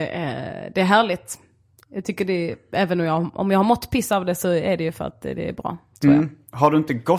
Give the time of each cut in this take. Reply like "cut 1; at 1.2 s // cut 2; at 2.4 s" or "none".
none